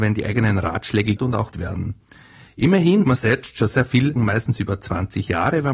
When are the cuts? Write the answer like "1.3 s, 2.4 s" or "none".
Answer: 1.2 s, 1.5 s, 3.0 s, 3.7 s, 4.2 s